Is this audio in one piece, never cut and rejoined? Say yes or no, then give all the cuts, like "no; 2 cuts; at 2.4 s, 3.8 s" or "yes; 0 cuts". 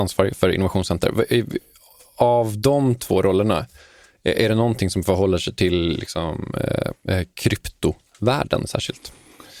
yes; 0 cuts